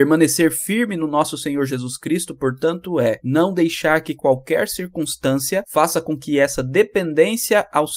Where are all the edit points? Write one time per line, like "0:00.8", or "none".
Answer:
none